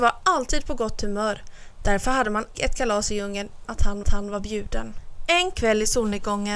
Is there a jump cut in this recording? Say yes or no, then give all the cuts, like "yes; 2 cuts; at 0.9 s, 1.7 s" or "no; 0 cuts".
yes; 3 cuts; at 2.5 s, 3.6 s, 4.0 s